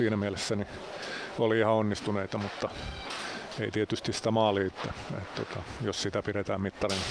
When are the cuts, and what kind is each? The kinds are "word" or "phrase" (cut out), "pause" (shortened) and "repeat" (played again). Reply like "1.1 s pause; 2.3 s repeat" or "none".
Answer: 4.7 s word